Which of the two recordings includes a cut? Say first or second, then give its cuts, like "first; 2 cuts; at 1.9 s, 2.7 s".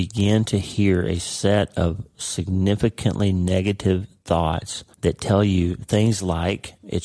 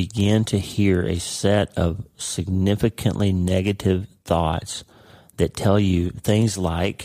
first; 1 cut; at 4.9 s